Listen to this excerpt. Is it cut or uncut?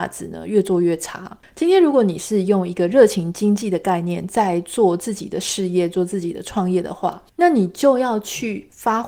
cut